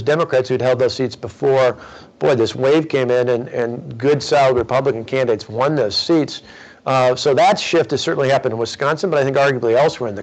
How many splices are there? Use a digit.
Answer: 0